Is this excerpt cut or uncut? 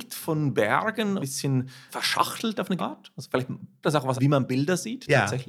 cut